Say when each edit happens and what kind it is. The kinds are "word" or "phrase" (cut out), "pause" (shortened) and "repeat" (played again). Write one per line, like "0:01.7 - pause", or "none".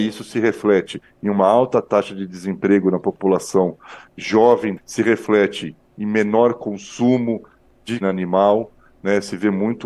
0:04.8 - phrase
0:08.0 - word